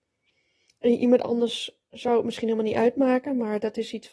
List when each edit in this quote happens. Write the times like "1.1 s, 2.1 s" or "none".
none